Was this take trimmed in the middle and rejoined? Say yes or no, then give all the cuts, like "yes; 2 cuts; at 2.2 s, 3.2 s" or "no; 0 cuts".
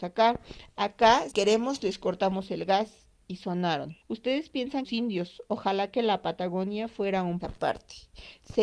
yes; 4 cuts; at 1.3 s, 4.0 s, 4.8 s, 7.4 s